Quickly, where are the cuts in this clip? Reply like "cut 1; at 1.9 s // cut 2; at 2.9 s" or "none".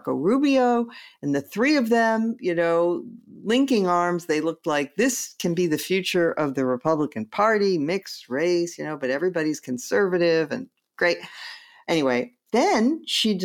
none